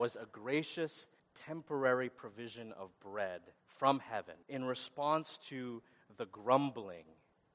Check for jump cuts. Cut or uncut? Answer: cut